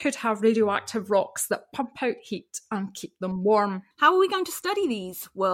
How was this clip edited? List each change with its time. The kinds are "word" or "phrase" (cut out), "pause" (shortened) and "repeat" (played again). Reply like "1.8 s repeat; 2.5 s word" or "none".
3.9 s pause